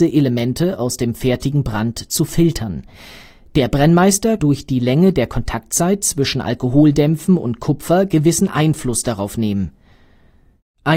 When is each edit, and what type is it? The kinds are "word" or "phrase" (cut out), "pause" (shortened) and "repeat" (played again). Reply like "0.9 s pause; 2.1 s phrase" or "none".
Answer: 4.4 s word